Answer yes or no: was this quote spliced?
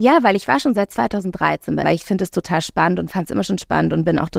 yes